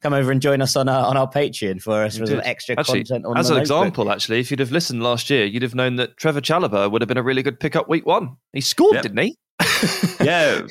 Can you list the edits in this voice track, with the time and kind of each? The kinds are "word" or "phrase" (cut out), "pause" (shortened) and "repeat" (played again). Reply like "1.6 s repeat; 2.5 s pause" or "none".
none